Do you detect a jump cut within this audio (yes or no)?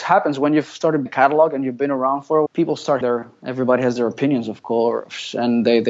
yes